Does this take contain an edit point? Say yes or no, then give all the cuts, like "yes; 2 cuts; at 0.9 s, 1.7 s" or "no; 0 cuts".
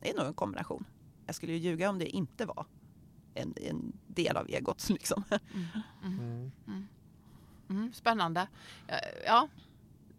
no; 0 cuts